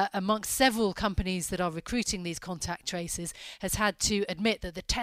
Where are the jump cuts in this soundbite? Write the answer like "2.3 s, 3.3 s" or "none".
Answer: none